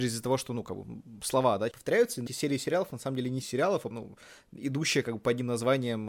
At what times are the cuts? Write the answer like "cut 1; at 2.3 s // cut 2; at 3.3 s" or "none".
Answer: cut 1; at 1.7 s // cut 2; at 2.3 s // cut 3; at 3.4 s // cut 4; at 3.9 s

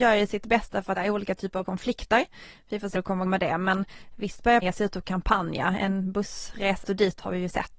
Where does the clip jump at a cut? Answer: cut 1; at 1.0 s // cut 2; at 1.6 s // cut 3; at 2.9 s // cut 4; at 3.3 s // cut 5; at 4.6 s // cut 6; at 6.8 s

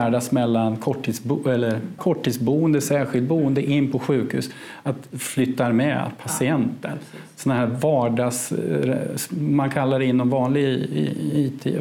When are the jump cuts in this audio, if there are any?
cut 1; at 2.0 s // cut 2; at 5.1 s

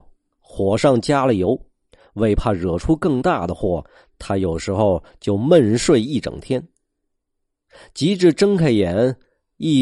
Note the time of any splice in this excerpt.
cut 1; at 1.9 s

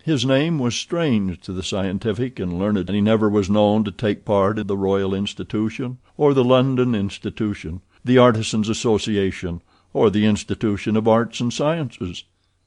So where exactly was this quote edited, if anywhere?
cut 1; at 2.9 s // cut 2; at 4.6 s

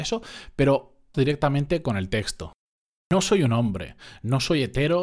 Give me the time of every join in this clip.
cut 1; at 1.1 s

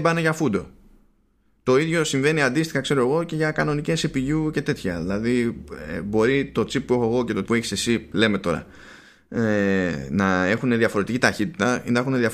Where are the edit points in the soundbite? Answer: cut 1; at 7.5 s

